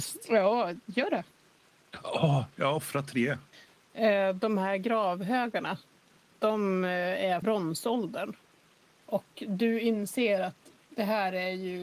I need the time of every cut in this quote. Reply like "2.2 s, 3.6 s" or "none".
7.4 s